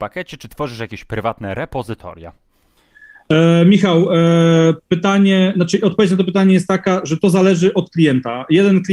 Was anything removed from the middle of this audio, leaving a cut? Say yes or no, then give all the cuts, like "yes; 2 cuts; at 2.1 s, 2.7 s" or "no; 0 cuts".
no; 0 cuts